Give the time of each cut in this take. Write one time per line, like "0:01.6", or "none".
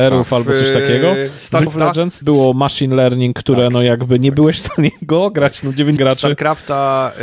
0:01.7
0:02.2
0:06.0